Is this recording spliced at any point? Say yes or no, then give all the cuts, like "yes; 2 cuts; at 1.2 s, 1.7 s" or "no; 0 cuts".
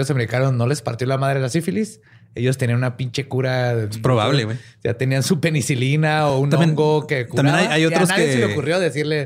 no; 0 cuts